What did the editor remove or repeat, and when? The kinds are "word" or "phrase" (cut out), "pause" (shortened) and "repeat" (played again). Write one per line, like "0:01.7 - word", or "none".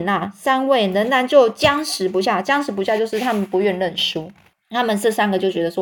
0:04.5 - pause